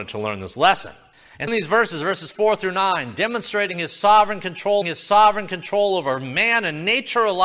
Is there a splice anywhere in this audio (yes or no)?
yes